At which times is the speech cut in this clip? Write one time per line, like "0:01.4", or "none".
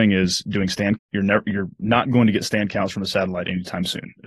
0:01.0